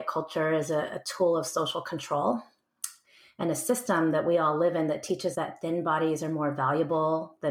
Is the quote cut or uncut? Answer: cut